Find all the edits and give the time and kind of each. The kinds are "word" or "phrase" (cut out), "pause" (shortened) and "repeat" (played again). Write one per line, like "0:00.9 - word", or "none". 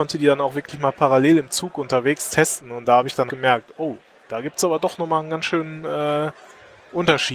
0:03.3 - word